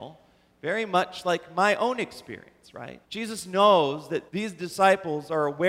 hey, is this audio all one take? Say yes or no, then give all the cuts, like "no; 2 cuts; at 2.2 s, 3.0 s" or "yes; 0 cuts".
no; 2 cuts; at 3.0 s, 4.3 s